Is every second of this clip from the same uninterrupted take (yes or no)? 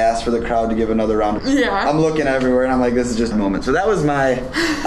no